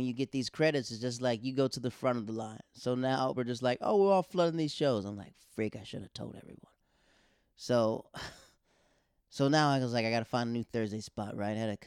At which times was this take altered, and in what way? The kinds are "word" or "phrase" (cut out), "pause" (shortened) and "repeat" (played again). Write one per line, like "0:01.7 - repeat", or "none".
0:03.3 - word